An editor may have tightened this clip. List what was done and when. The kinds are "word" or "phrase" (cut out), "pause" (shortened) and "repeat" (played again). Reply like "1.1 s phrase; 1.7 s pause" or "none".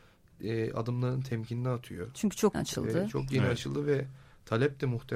2.5 s word